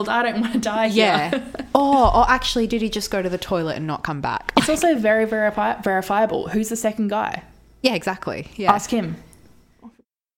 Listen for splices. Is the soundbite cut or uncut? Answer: uncut